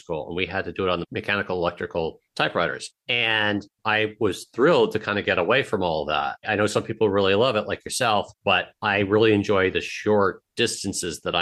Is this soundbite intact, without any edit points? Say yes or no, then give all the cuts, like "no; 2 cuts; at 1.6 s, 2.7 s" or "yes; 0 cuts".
yes; 0 cuts